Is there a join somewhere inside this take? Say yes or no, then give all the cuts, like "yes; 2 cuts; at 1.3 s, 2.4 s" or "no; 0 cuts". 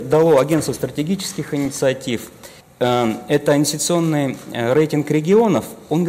yes; 1 cut; at 2.6 s